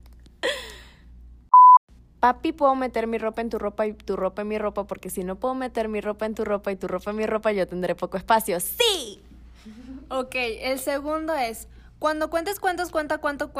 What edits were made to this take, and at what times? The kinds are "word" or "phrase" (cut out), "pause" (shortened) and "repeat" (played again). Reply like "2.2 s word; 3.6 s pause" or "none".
none

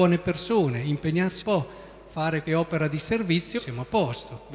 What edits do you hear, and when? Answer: 1.4 s word; 2.5 s word; 3.6 s word

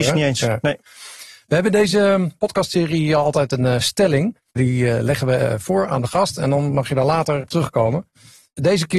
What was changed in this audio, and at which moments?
4.5 s pause

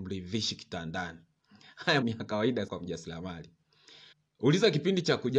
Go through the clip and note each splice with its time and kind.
2.0 s word; 2.7 s word; 4.1 s pause

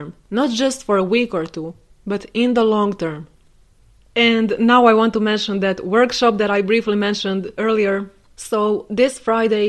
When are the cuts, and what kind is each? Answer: none

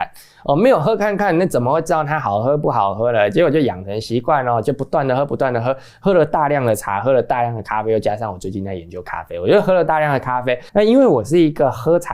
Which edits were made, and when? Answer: 10.7 s pause

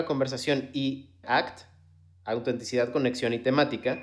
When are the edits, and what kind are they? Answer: 1.2 s word

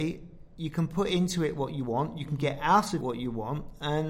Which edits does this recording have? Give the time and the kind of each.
3.0 s word

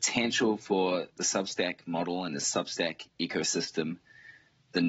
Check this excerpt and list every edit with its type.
1.1 s pause

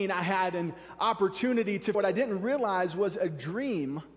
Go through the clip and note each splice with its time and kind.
1.9 s word

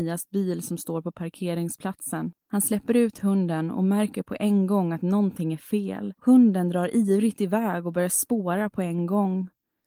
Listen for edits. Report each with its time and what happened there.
2.4 s pause; 6.2 s pause

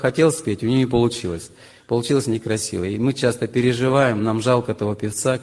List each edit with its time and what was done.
none

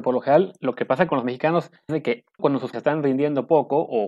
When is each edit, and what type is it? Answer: 1.9 s word; 2.4 s word; 2.7 s word

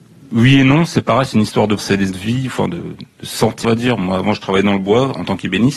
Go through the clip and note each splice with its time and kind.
1.8 s word; 2.1 s phrase; 3.6 s word

